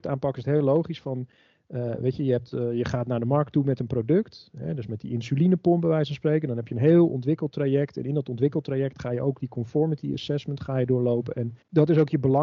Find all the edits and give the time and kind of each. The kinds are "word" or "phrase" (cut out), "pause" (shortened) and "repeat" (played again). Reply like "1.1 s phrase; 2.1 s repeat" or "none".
none

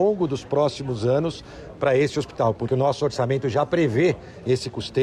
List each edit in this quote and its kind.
2.7 s word

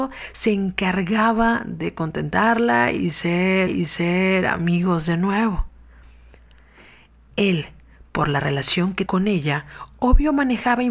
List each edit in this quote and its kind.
3.7 s repeat; 9.1 s word

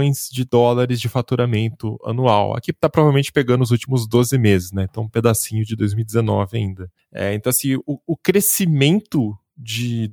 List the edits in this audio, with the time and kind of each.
none

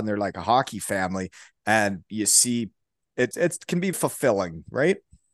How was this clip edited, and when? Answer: 2.1 s word; 3.3 s word; 3.9 s word

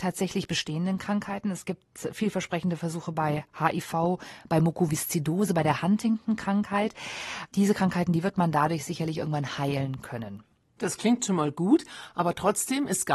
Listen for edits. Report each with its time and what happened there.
none

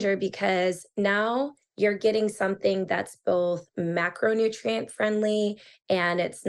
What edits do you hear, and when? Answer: none

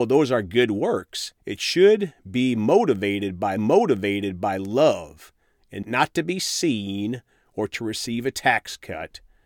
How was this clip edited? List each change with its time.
1.4 s pause; 3.6 s repeat; 5.8 s word

